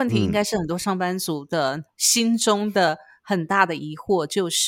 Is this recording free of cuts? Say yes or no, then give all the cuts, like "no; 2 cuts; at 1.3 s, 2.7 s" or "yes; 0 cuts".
yes; 0 cuts